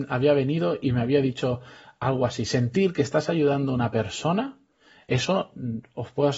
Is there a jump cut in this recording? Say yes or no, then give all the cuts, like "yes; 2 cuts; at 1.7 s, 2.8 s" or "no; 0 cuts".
no; 0 cuts